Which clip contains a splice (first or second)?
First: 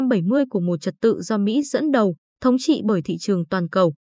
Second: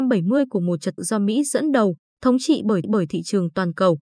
second